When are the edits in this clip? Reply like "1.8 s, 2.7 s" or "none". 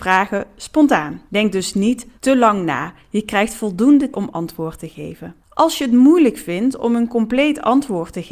1.3 s, 2.2 s, 4.1 s, 5.4 s

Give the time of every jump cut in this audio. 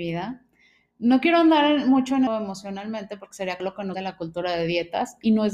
2.3 s, 3.6 s, 3.9 s

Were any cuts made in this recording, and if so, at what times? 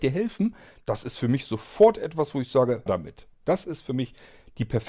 2.9 s, 3.3 s

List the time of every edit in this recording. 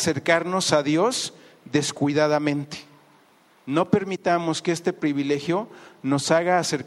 none

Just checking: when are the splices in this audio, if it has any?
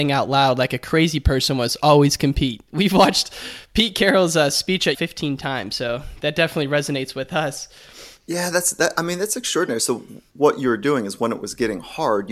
4.9 s

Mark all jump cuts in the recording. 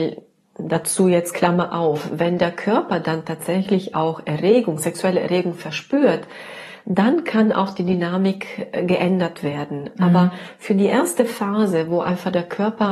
none

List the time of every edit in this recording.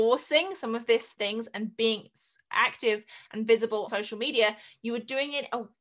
1.2 s, 3.9 s

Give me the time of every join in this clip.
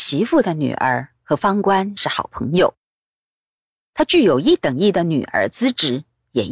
none

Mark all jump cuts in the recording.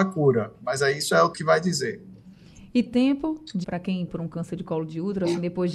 1.3 s, 2.9 s, 3.6 s, 4.1 s

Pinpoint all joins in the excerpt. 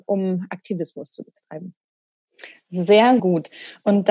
3.2 s

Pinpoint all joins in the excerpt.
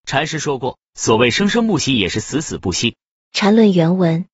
none

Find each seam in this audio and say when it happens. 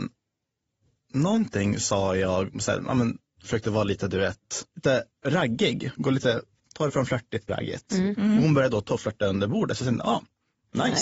4.7 s, 7.5 s

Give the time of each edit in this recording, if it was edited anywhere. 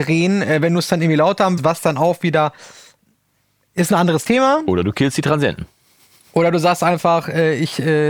1.6 s

